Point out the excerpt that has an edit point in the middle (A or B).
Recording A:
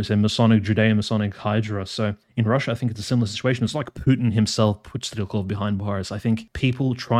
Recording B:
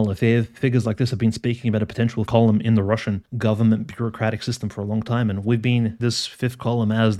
B